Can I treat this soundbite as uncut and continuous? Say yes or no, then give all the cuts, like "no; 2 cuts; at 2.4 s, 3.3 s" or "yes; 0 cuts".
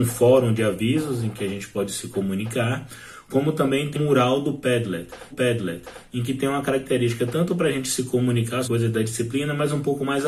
no; 3 cuts; at 3.9 s, 5.3 s, 8.6 s